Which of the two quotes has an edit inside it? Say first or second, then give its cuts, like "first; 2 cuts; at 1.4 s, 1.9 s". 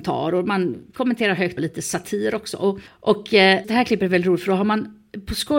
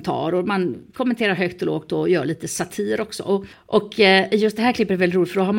first; 2 cuts; at 1.6 s, 3.6 s